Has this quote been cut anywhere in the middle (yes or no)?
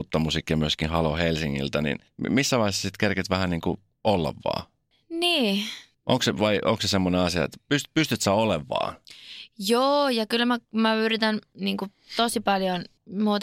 no